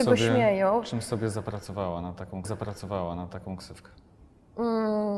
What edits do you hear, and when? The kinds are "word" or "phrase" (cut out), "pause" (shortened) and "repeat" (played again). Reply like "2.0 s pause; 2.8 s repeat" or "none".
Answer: 2.4 s repeat